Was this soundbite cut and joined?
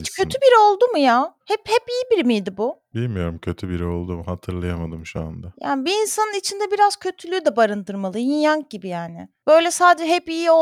yes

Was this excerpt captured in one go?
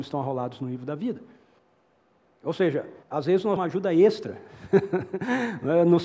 no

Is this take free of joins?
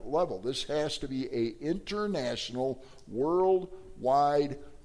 yes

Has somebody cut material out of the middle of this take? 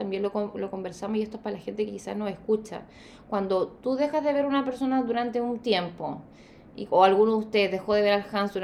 no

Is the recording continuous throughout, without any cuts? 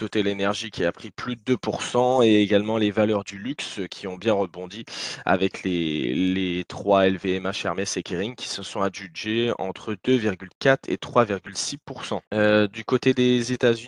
no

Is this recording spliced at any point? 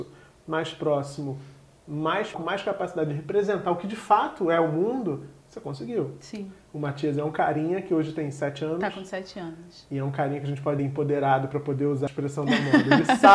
yes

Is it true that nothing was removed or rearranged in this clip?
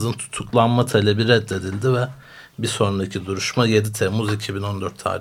yes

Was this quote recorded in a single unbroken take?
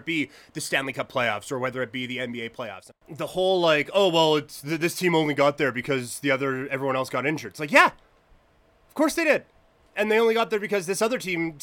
yes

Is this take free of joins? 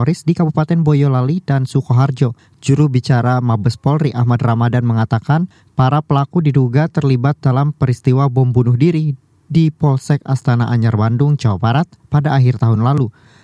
yes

